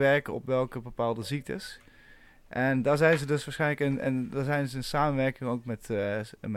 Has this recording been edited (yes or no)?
no